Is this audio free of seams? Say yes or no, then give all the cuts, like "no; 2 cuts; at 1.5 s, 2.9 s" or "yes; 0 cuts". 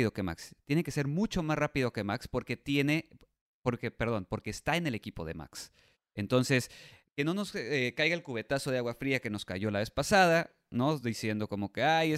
yes; 0 cuts